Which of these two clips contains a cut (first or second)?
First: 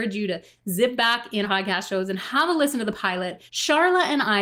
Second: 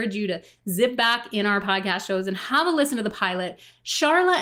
first